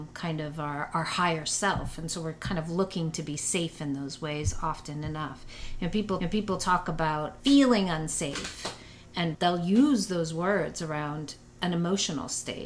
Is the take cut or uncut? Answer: cut